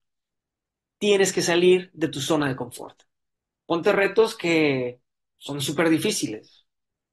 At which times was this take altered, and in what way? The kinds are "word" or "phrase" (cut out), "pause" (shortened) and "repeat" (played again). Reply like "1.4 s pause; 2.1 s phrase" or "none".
none

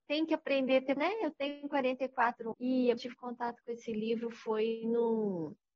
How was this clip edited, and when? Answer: 1.0 s word; 2.5 s word; 3.0 s phrase

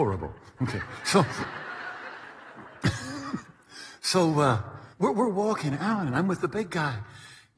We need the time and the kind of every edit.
4.9 s pause

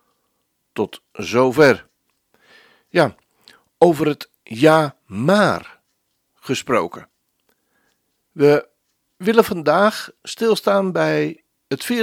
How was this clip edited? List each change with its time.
none

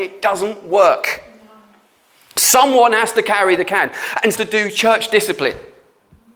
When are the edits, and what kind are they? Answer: 4.3 s phrase

